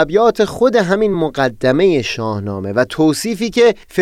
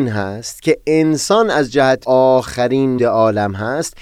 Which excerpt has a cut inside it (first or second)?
second